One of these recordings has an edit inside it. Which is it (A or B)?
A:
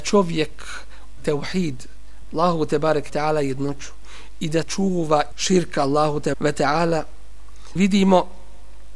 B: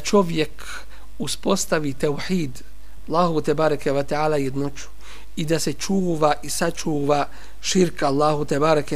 A